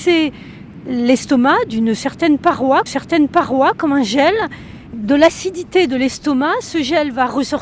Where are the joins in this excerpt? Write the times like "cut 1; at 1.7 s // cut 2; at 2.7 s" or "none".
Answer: cut 1; at 2.9 s // cut 2; at 4.9 s

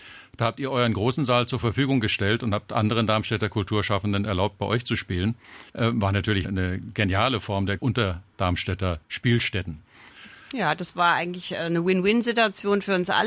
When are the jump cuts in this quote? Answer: cut 1; at 5.7 s // cut 2; at 6.4 s // cut 3; at 7.8 s // cut 4; at 9.0 s

